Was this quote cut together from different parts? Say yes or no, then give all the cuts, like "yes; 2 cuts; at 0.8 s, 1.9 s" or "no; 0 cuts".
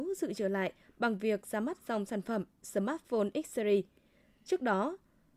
no; 0 cuts